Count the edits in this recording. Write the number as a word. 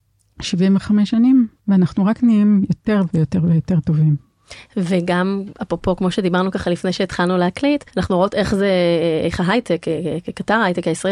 two